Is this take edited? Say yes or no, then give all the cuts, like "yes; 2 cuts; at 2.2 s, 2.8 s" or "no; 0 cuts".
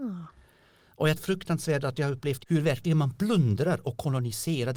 yes; 2 cuts; at 1.2 s, 2.4 s